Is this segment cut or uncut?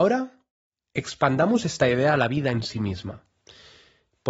uncut